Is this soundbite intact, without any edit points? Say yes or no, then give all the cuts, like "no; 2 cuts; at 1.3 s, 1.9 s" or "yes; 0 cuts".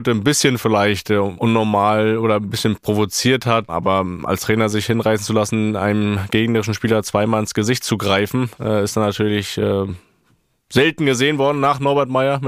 yes; 0 cuts